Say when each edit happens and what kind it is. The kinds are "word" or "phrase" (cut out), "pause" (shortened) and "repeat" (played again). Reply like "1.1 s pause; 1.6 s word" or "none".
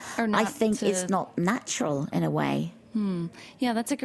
1.1 s word

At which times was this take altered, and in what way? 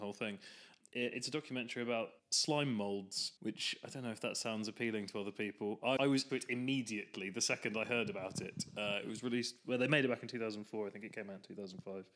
2.2 s pause; 3.4 s pause; 6.0 s word; 6.3 s word

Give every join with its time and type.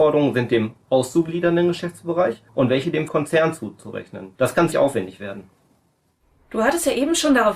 2.5 s pause; 3.1 s word; 4.3 s pause; 4.7 s word

